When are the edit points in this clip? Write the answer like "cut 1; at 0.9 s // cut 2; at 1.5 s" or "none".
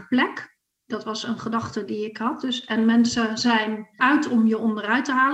cut 1; at 4.0 s